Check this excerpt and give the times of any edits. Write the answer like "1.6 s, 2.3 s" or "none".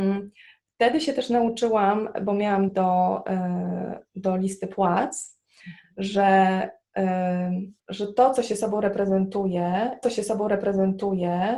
2.7 s, 7.8 s, 10.0 s